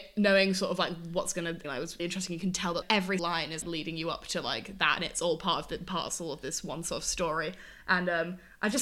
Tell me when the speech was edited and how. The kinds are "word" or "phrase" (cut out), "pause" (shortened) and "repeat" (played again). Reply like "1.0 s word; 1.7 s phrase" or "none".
1.6 s phrase; 2.0 s word; 2.8 s word; 3.2 s word; 3.6 s word